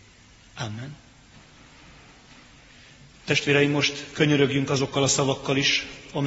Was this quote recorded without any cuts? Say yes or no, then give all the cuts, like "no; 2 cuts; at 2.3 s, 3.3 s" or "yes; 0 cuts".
yes; 0 cuts